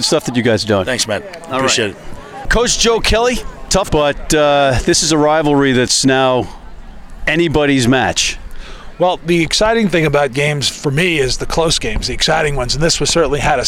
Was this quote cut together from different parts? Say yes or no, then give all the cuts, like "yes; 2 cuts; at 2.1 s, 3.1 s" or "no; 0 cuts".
yes; 1 cut; at 3.9 s